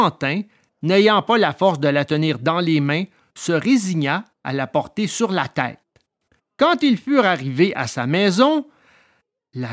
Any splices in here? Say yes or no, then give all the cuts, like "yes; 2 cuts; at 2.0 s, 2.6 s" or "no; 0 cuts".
no; 0 cuts